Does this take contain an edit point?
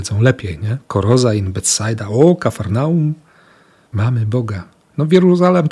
no; 0 cuts

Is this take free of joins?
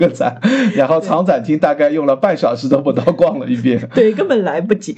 yes; 0 cuts

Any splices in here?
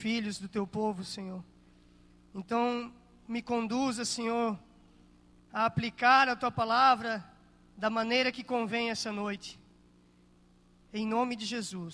no; 0 cuts

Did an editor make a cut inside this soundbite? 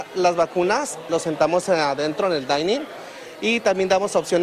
no; 0 cuts

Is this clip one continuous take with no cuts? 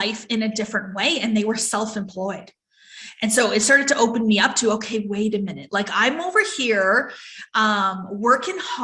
yes; 0 cuts

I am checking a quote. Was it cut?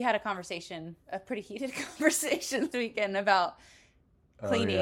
yes; 2 cuts; at 1.0 s, 2.7 s

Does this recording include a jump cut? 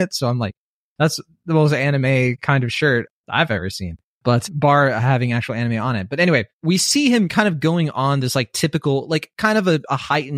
yes; 2 cuts; at 4.0 s, 6.5 s

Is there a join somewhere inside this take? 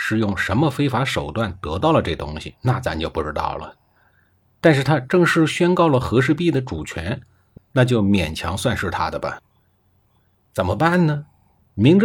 no; 0 cuts

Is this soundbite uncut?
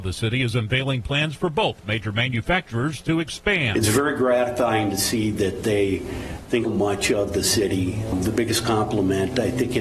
no; 1 cut; at 6.6 s

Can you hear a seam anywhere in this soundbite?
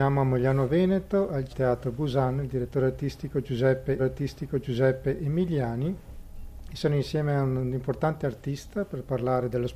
yes; 2 cuts; at 1.5 s, 4.0 s

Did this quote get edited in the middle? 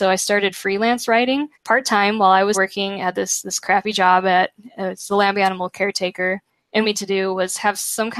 yes; 3 cuts; at 1.5 s, 2.5 s, 6.8 s

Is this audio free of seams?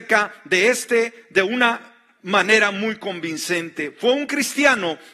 yes; 0 cuts

